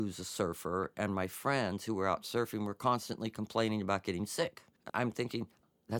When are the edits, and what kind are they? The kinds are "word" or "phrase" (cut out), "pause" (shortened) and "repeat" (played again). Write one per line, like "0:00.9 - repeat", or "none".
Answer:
0:04.9 - word